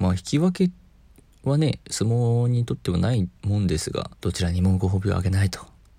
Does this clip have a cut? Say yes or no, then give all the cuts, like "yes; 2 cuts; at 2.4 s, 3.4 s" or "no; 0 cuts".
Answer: yes; 2 cuts; at 3.4 s, 4.1 s